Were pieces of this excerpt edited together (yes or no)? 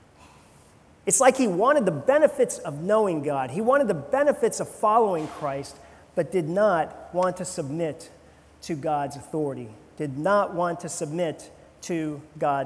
no